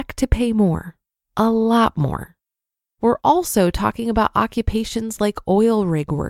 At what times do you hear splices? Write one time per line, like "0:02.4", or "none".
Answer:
none